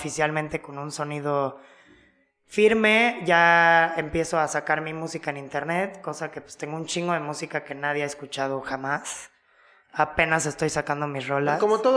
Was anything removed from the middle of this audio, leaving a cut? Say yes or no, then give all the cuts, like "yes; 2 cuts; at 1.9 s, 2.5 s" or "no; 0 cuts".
no; 0 cuts